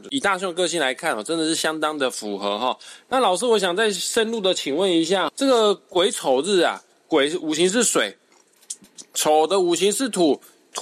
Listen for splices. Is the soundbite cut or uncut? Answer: cut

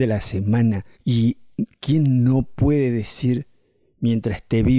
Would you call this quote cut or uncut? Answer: cut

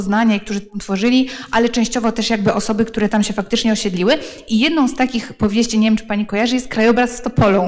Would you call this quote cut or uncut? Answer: uncut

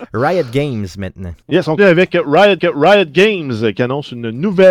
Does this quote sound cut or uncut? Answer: cut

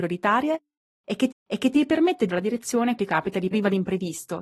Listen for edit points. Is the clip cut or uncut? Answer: cut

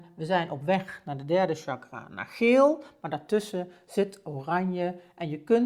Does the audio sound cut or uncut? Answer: uncut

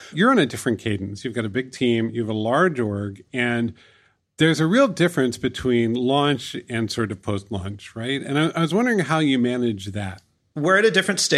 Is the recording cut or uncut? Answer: uncut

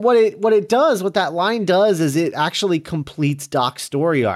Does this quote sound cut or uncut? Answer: uncut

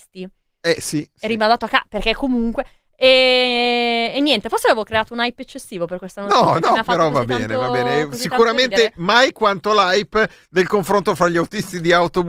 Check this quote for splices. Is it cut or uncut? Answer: uncut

